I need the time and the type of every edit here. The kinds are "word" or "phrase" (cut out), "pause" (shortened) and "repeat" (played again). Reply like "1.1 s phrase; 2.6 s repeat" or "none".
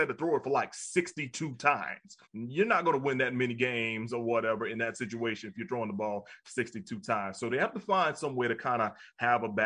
2.2 s pause